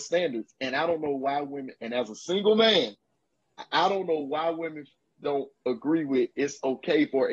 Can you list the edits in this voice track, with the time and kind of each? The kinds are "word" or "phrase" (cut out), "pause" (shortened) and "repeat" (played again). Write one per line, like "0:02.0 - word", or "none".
none